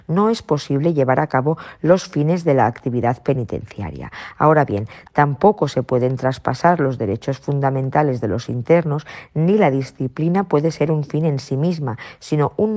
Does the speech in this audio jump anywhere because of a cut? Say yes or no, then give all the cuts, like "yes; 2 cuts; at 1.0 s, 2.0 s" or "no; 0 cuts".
no; 0 cuts